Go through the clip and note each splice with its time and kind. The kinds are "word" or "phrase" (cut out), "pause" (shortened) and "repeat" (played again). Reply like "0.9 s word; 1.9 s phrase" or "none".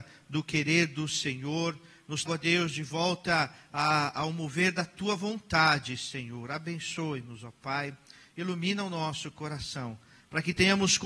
2.3 s word